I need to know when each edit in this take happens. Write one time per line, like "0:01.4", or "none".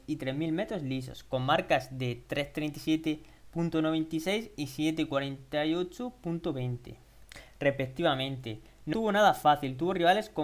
0:08.9